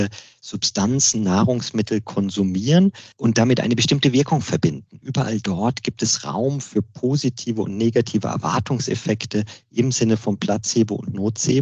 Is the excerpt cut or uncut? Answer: cut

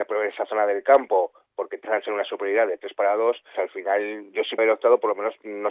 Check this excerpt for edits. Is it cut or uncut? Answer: cut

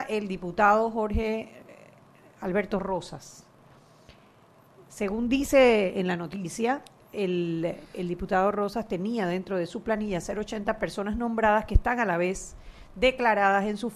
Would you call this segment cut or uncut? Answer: uncut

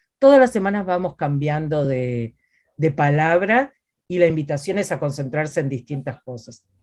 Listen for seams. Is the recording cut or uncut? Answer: uncut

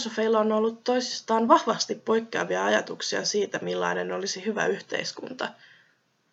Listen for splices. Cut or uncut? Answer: uncut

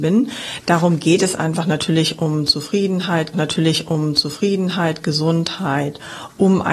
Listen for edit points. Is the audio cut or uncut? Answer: cut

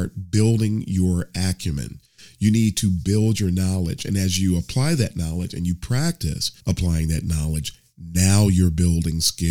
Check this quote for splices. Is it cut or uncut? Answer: cut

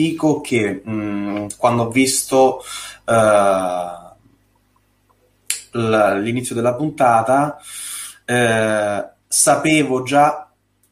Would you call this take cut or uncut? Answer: cut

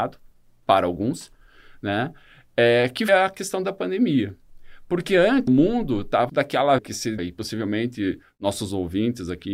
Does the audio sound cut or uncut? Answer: cut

